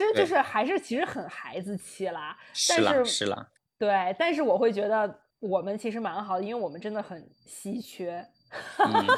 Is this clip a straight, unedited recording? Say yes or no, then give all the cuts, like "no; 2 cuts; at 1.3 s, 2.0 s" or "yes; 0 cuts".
no; 3 cuts; at 3.6 s, 5.3 s, 7.3 s